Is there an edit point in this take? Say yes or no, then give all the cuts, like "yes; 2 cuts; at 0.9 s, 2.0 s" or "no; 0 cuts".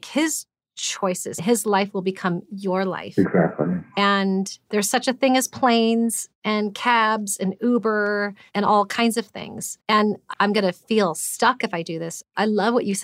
yes; 3 cuts; at 1.4 s, 9.8 s, 10.3 s